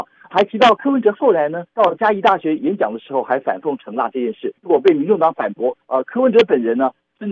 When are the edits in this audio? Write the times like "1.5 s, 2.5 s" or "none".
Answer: 1.7 s, 4.6 s